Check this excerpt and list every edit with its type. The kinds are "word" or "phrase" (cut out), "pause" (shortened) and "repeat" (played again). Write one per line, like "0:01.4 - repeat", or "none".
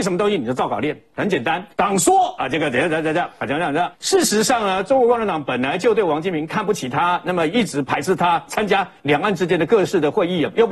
0:01.7 - pause
0:03.9 - pause